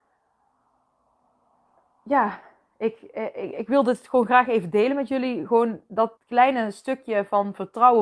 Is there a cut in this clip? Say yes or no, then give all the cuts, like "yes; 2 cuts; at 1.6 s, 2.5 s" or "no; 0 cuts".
yes; 1 cut; at 6.2 s